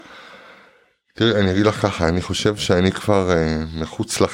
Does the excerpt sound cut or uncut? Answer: uncut